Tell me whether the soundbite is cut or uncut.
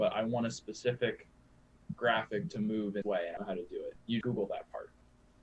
cut